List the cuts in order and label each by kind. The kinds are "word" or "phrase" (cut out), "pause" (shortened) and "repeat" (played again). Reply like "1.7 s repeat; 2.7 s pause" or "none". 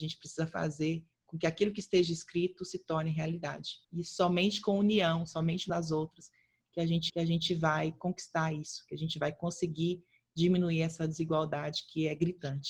1.1 s pause; 3.8 s pause; 5.7 s word; 7.1 s repeat